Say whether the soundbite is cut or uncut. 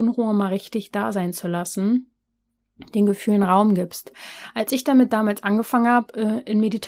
uncut